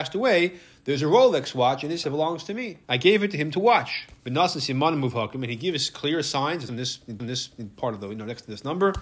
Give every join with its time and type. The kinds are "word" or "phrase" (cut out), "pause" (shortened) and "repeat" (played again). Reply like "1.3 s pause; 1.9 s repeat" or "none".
2.0 s word; 2.8 s pause; 4.2 s pause; 6.7 s phrase; 7.2 s repeat